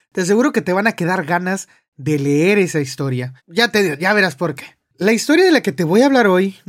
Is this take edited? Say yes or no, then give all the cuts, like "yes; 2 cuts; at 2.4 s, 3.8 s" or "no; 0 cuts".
yes; 1 cut; at 3.4 s